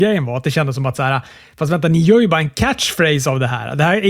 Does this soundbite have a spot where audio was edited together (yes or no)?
no